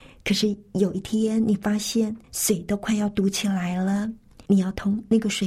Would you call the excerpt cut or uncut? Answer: cut